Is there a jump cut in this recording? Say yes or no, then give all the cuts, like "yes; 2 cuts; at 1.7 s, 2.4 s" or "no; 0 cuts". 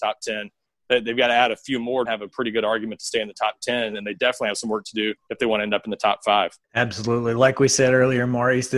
yes; 3 cuts; at 2.1 s, 5.2 s, 6.6 s